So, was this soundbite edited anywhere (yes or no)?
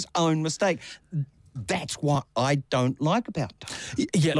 no